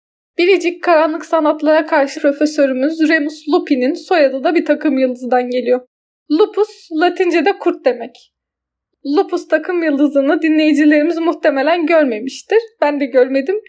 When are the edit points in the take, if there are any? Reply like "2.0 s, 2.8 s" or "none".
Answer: 2.1 s